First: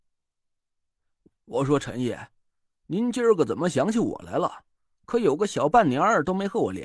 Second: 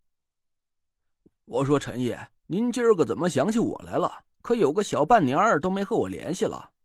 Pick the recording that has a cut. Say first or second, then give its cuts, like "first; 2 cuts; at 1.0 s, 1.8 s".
second; 2 cuts; at 2.4 s, 4.3 s